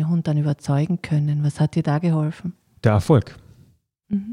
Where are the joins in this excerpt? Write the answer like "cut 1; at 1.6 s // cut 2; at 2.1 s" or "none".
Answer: none